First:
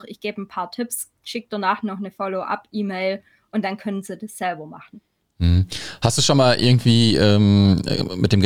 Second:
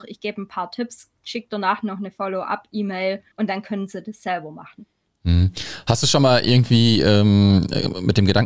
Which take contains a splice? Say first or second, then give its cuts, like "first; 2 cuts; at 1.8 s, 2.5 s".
second; 1 cut; at 3.3 s